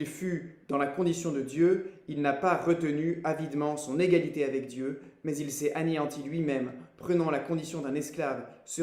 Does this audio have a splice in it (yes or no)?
no